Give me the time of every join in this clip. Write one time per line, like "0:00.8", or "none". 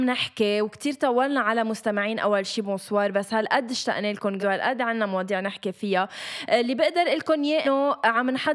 0:04.4
0:07.6